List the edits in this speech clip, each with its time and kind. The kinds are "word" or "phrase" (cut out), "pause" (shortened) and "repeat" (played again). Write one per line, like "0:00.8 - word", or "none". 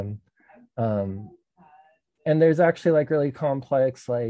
none